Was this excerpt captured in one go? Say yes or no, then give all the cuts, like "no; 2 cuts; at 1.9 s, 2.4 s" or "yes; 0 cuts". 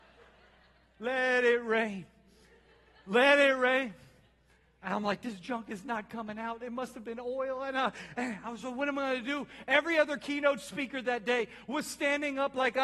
yes; 0 cuts